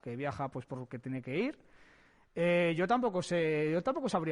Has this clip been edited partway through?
no; 0 cuts

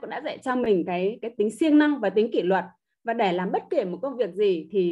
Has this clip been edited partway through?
no; 0 cuts

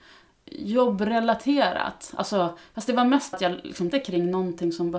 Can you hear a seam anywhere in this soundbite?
yes; 2 cuts; at 3.3 s, 3.9 s

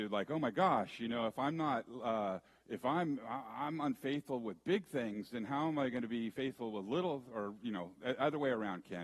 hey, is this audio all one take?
no; 1 cut; at 2.5 s

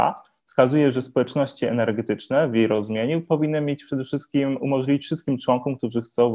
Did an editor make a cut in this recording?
no; 0 cuts

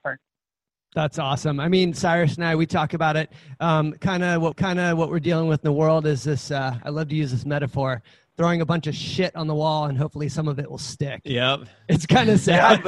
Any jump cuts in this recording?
yes; 1 cut; at 4.5 s

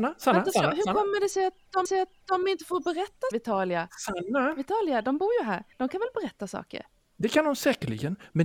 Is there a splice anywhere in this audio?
yes; 3 cuts; at 1.9 s, 3.3 s, 5.7 s

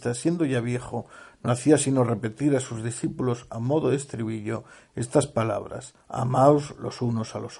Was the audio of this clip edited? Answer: yes; 1 cut; at 6.0 s

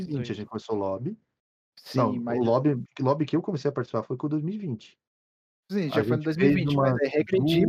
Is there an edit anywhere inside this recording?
no; 0 cuts

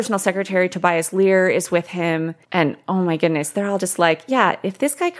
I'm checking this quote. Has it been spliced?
yes; 1 cut; at 2.4 s

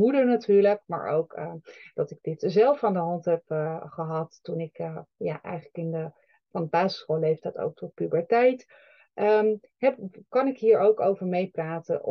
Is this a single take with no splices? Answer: yes; 0 cuts

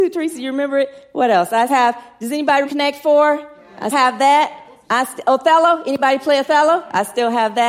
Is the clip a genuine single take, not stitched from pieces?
no; 3 cuts; at 1.7 s, 2.6 s, 3.9 s

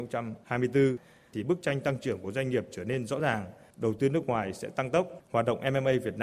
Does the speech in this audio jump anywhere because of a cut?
no; 0 cuts

